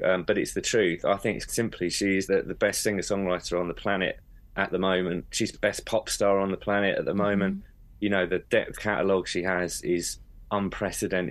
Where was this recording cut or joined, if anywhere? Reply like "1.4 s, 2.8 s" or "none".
1.5 s, 2.3 s, 5.5 s, 8.7 s